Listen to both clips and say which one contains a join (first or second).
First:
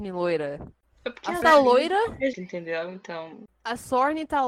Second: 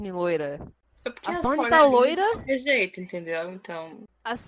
first